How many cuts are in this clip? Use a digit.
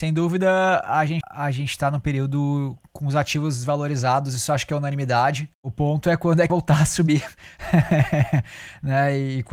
4